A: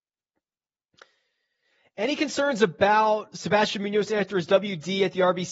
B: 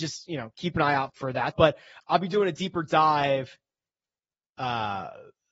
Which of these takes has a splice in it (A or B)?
B